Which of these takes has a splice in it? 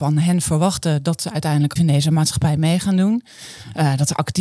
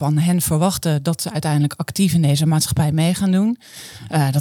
first; 1 cut; at 1.8 s

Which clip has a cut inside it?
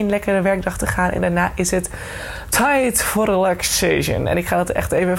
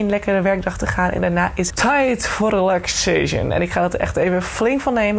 second; 1 cut; at 1.7 s

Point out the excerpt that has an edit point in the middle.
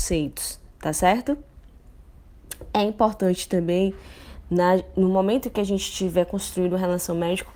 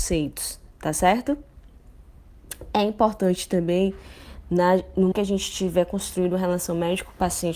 second; 1 cut; at 5.1 s

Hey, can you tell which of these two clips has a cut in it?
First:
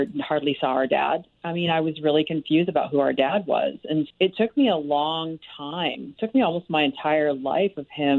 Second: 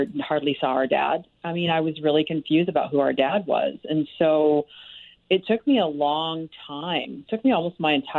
first; 1 cut; at 4.1 s

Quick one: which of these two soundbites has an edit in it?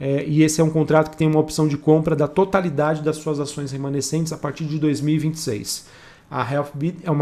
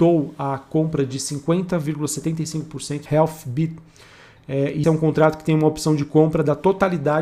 second; 2 cuts; at 3.1 s, 4.8 s

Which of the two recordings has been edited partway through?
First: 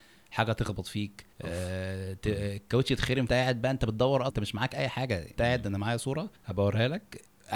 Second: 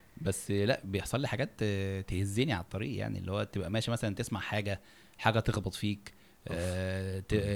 first; 5 cuts; at 1.3 s, 3.3 s, 4.3 s, 5.4 s, 6.4 s

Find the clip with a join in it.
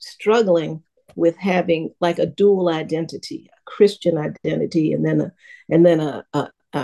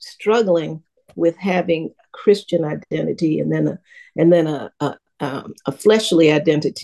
second; 1 cut; at 2.0 s

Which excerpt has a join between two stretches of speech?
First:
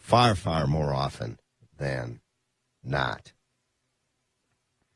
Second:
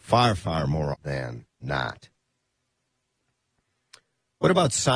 second; 2 cuts; at 0.9 s, 1.5 s

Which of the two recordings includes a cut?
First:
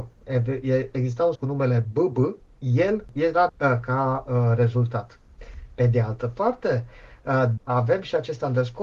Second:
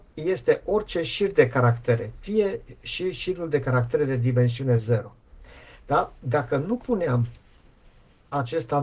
first; 4 cuts; at 1.3 s, 2.5 s, 3.5 s, 7.6 s

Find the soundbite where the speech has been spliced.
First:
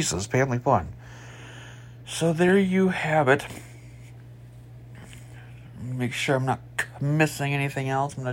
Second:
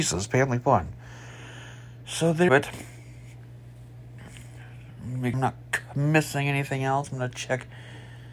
second; 2 cuts; at 2.5 s, 5.3 s

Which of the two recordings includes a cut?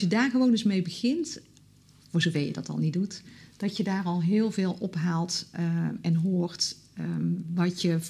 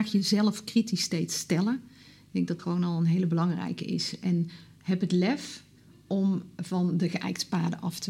second; 1 cut; at 2.6 s

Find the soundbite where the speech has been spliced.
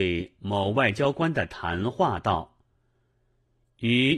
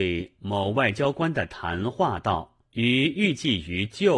second; 1 cut; at 2.7 s

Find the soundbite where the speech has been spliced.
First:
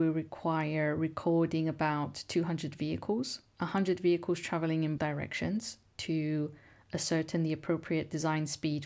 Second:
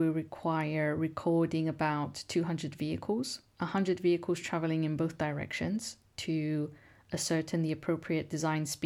first; 1 cut; at 5.0 s

